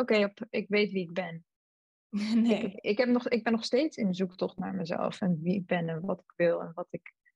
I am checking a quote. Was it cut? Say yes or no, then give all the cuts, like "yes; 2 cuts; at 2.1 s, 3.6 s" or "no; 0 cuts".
no; 0 cuts